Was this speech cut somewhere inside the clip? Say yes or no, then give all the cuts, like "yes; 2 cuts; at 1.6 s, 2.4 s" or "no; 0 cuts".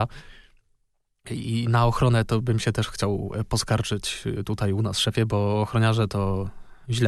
no; 0 cuts